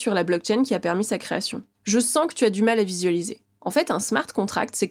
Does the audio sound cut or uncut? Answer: uncut